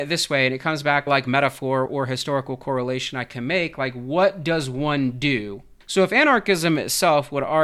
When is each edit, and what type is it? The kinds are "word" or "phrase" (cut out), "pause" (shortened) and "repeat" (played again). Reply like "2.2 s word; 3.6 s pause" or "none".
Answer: 1.1 s phrase; 1.9 s word; 5.8 s pause